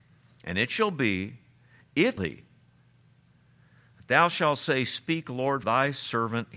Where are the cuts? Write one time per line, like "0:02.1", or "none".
0:02.2
0:05.6